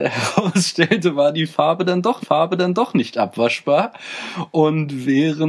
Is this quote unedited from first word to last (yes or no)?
no